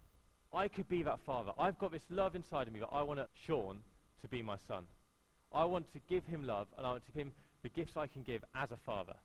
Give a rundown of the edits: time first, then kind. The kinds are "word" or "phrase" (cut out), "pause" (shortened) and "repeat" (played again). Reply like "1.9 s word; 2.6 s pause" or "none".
3.2 s word; 7.1 s word